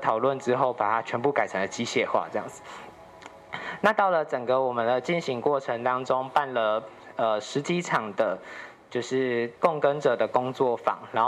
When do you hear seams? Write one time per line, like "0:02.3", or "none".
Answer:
0:09.6